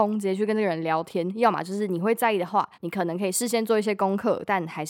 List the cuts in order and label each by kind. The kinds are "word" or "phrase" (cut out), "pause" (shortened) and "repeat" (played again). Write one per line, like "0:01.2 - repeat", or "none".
0:02.7 - pause